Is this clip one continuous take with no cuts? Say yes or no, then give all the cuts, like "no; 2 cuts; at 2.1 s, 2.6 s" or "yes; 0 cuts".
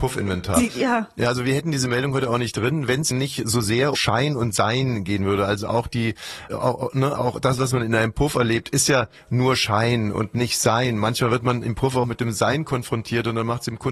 no; 5 cuts; at 3.1 s, 3.9 s, 6.5 s, 7.2 s, 12.0 s